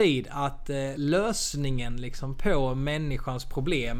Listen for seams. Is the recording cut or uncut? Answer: uncut